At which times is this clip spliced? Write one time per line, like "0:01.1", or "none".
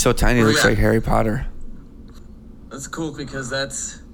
0:03.2

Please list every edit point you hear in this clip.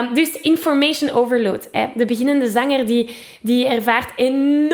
none

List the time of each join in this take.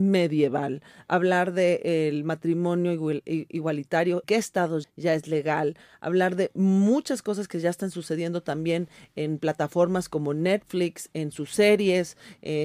0:04.2
0:04.8

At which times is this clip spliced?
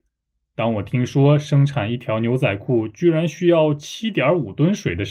none

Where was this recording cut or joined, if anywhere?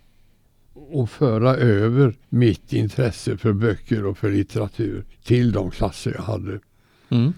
0:02.2
0:05.1

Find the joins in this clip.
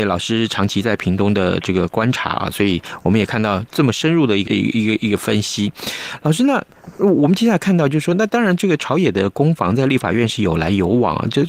0:04.5

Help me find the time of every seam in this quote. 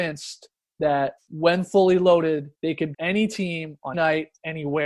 0:01.2
0:02.5
0:02.9
0:03.9

